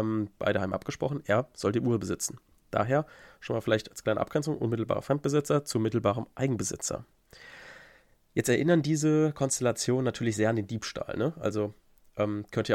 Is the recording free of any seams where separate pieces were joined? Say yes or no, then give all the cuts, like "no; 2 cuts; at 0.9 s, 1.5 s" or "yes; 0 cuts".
yes; 0 cuts